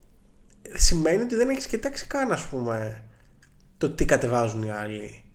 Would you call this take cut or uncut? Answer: uncut